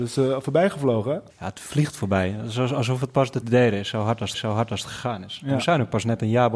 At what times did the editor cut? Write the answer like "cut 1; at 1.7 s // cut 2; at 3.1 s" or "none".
cut 1; at 1.3 s // cut 2; at 3.4 s // cut 3; at 4.3 s